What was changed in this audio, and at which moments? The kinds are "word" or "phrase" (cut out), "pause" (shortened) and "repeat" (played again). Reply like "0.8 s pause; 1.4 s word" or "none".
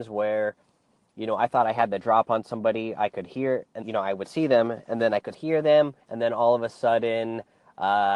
3.8 s word; 5.3 s word; 6.0 s pause